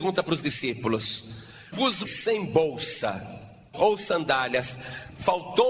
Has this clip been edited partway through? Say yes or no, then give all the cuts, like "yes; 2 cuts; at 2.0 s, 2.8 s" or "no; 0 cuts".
yes; 3 cuts; at 1.7 s, 2.0 s, 3.7 s